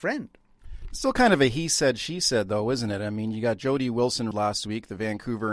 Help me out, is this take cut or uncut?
cut